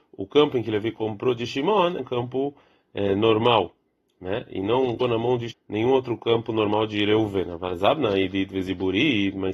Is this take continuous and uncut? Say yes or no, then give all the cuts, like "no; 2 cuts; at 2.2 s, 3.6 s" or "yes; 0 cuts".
no; 3 cuts; at 2.0 s, 5.0 s, 5.5 s